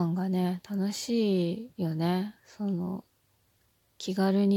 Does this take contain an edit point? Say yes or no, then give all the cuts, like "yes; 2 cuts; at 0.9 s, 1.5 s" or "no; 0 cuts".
yes; 2 cuts; at 1.7 s, 2.4 s